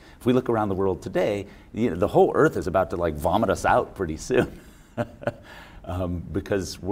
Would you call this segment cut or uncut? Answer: uncut